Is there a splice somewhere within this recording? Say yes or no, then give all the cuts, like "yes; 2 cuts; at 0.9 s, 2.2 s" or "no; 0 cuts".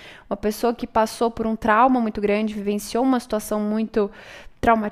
no; 0 cuts